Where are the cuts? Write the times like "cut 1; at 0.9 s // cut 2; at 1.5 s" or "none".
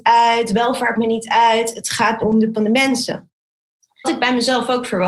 cut 1; at 1.0 s // cut 2; at 2.2 s // cut 3; at 2.5 s // cut 4; at 4.0 s